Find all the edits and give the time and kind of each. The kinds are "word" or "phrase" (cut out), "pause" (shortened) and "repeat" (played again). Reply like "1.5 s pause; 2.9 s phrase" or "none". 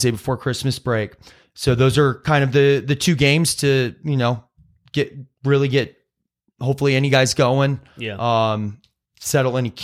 none